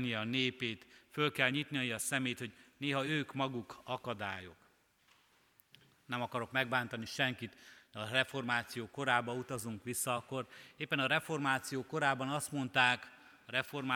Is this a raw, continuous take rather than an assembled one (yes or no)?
yes